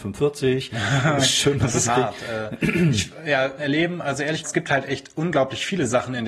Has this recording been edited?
yes; 3 cuts; at 1.9 s, 3.6 s, 4.4 s

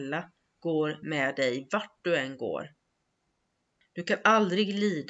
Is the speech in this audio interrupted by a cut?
no; 0 cuts

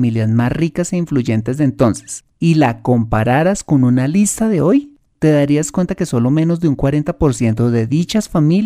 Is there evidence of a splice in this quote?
no; 0 cuts

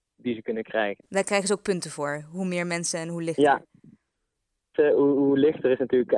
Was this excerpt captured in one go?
yes; 0 cuts

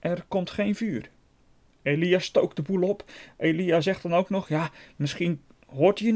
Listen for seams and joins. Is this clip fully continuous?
yes; 0 cuts

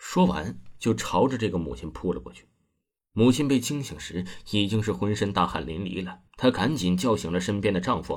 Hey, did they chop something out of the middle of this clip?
yes; 1 cut; at 6.3 s

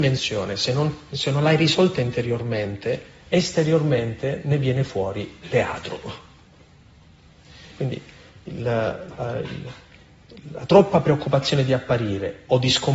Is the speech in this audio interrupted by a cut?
no; 0 cuts

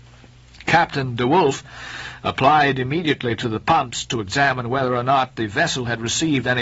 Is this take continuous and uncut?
yes; 0 cuts

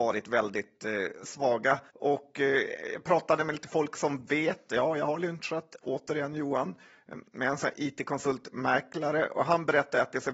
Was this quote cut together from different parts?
yes; 1 cut; at 1.9 s

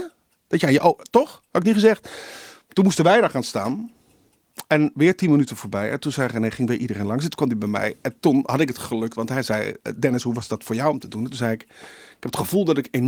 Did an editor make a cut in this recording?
no; 0 cuts

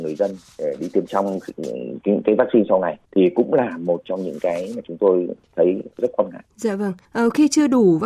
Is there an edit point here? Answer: yes; 5 cuts; at 1.1 s, 3.1 s, 5.9 s, 6.5 s, 7.0 s

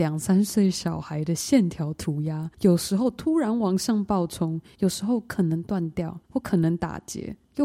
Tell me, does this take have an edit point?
yes; 3 cuts; at 2.5 s, 4.7 s, 6.2 s

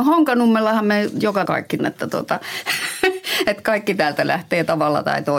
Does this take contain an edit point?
yes; 2 cuts; at 1.5 s, 1.8 s

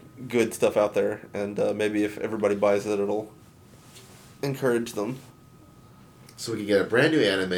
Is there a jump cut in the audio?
no; 0 cuts

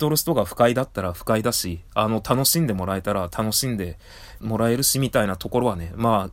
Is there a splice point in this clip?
yes; 1 cut; at 4.4 s

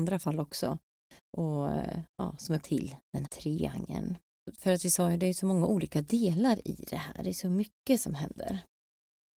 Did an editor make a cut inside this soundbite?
yes; 2 cuts; at 2.6 s, 3.2 s

